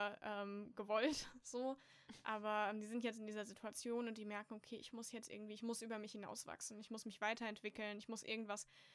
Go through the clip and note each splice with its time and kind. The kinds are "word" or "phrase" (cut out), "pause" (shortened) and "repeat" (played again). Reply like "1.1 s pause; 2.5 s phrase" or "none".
none